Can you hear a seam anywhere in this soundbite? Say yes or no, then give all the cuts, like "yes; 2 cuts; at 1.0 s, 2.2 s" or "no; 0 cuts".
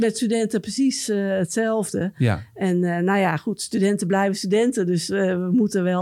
no; 0 cuts